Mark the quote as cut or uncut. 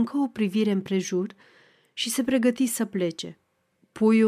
uncut